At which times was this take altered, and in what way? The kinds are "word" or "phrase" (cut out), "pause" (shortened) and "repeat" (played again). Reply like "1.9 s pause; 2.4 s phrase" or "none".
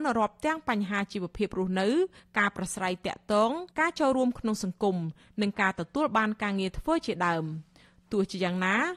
3.7 s pause